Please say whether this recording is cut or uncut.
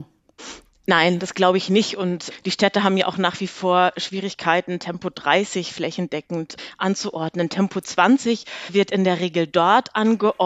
uncut